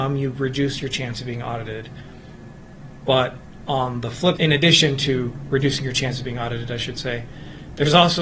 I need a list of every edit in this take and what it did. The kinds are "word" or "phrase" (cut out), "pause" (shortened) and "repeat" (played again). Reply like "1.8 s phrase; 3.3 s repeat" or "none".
4.4 s phrase

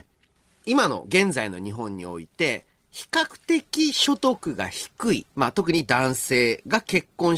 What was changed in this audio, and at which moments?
5.3 s pause

